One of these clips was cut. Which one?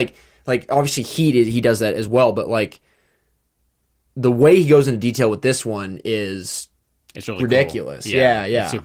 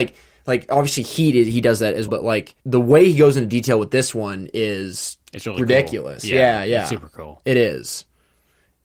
second; 3 cuts; at 2.1 s, 2.6 s, 5.2 s

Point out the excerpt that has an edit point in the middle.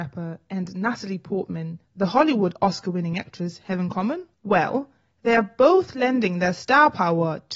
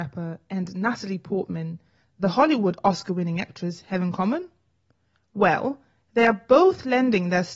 first; 2 cuts; at 1.8 s, 4.3 s

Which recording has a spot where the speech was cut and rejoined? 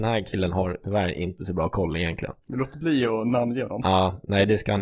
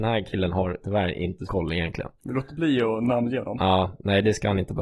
second; 1 cut; at 1.5 s

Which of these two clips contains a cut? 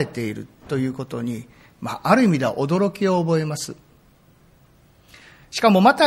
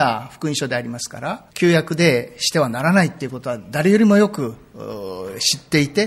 second; 1 cut; at 1.5 s

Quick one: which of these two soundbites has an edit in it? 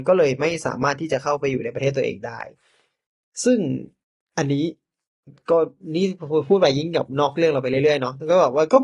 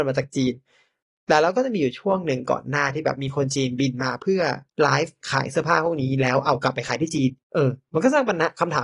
second; 2 cuts; at 4.7 s, 7.4 s

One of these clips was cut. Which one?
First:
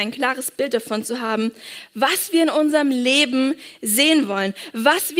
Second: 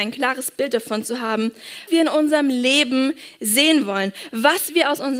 second; 1 cut; at 1.9 s

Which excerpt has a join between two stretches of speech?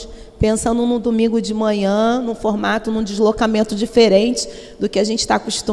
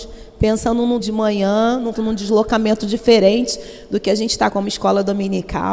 second; 3 cuts; at 1.0 s, 1.9 s, 4.5 s

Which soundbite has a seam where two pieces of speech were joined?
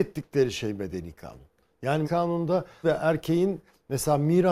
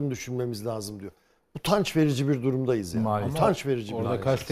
first; 2 cuts; at 2.0 s, 2.8 s

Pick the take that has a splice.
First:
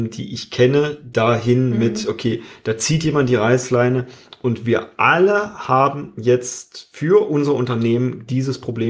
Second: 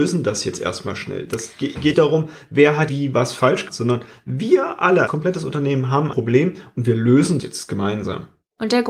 second; 6 cuts; at 1.9 s, 2.9 s, 3.7 s, 5.1 s, 6.1 s, 7.4 s

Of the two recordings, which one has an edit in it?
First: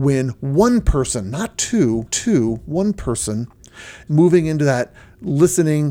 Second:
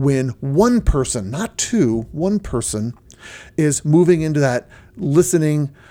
first; 2 cuts; at 2.1 s, 4.1 s

